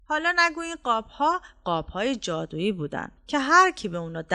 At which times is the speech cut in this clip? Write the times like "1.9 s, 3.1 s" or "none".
3.2 s